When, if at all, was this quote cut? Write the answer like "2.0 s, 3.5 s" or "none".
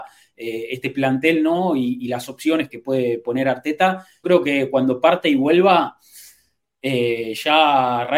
2.7 s, 4.2 s